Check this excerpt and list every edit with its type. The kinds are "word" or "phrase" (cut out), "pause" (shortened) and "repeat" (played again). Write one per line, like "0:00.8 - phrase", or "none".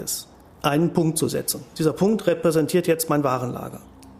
none